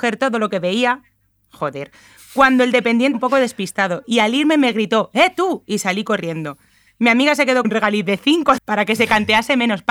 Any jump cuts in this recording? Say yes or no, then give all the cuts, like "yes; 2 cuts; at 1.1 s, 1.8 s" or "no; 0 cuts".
yes; 3 cuts; at 3.1 s, 7.6 s, 8.6 s